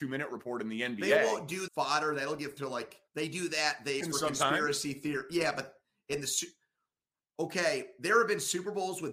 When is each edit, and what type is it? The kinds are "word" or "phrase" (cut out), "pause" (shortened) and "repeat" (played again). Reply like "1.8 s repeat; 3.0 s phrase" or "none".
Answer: 1.7 s phrase; 2.6 s word; 3.1 s pause; 4.0 s phrase